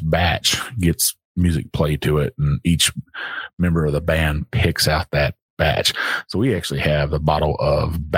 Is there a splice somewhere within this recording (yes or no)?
no